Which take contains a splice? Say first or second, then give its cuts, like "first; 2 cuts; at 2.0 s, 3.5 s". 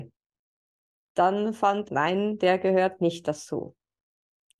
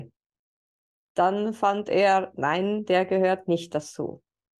first; 1 cut; at 1.9 s